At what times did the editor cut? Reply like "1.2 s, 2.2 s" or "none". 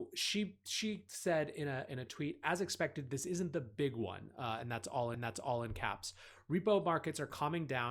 5.1 s